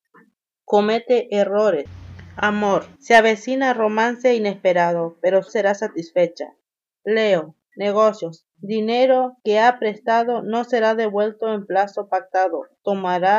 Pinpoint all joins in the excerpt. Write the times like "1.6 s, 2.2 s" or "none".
2.9 s, 5.5 s